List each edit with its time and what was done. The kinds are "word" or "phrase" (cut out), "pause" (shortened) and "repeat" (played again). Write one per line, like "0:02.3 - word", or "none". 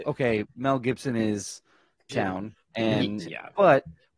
0:02.1 - word
0:03.2 - phrase

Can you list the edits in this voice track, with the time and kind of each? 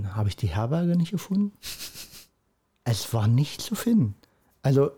none

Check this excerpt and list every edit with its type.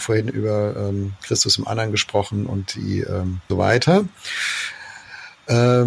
0:03.5 - phrase

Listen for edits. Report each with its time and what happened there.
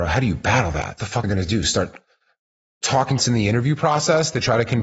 0:01.2 - word
0:03.2 - phrase

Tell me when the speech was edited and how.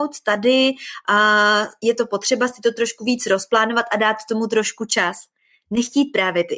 none

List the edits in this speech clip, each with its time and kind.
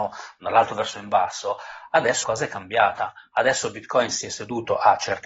0:02.2 - word

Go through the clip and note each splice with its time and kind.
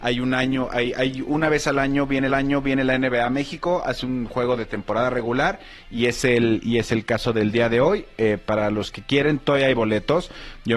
0:02.3 - repeat

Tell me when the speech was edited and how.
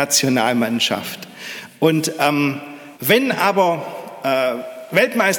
0:03.0 - pause

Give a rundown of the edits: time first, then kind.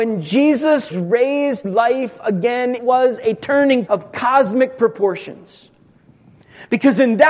0:00.9 - word
0:01.6 - word
0:02.8 - word
0:03.9 - word

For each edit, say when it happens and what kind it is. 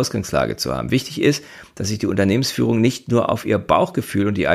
none

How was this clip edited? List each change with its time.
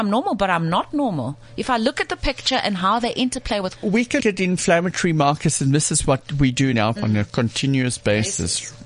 0:03.8 - word
0:04.2 - word
0:07.0 - word

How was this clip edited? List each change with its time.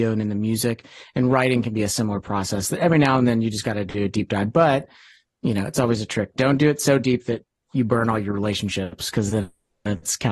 none

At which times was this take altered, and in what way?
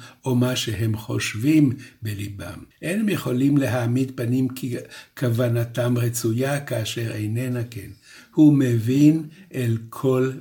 0:02.7 - pause

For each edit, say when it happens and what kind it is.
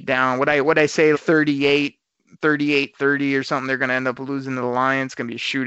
0:01.1 - word

